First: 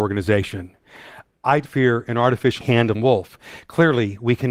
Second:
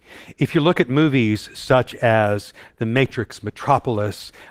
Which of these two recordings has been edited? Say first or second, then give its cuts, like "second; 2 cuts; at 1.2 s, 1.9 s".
first; 3 cuts; at 1.7 s, 2.6 s, 2.9 s